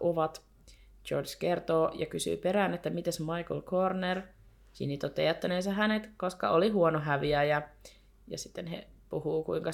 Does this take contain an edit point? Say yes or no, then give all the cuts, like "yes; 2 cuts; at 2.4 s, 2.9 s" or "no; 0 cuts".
no; 0 cuts